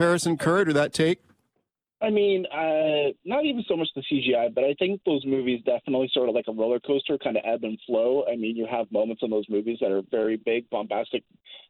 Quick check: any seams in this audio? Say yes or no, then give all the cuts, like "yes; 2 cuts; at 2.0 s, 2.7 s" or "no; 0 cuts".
no; 0 cuts